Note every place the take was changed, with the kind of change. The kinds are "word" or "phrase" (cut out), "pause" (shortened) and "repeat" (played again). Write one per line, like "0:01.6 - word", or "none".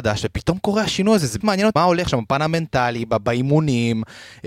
0:01.4 - word
0:01.8 - word